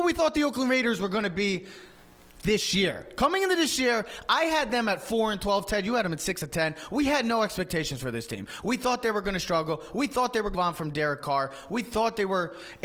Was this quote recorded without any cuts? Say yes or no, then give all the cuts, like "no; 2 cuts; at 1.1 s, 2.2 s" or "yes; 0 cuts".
no; 1 cut; at 10.5 s